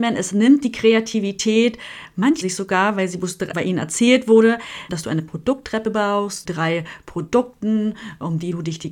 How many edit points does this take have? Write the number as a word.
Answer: four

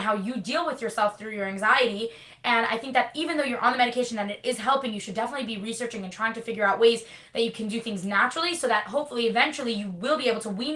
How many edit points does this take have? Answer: zero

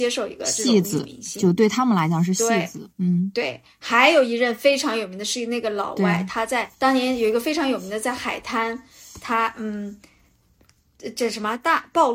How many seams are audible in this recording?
two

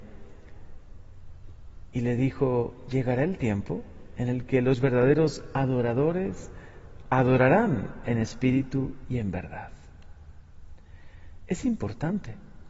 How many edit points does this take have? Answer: zero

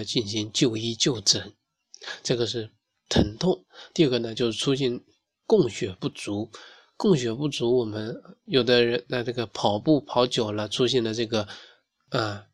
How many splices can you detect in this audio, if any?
zero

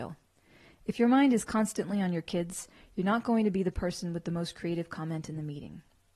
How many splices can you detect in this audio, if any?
zero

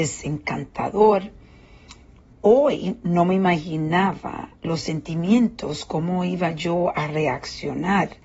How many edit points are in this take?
two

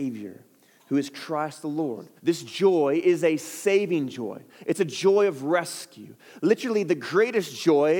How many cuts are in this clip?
one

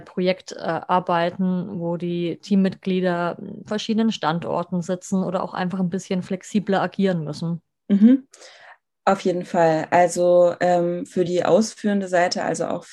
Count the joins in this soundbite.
zero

